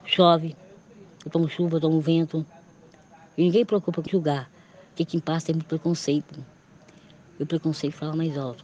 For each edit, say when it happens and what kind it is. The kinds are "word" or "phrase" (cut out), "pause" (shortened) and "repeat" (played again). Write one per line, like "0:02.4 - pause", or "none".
0:04.1 - phrase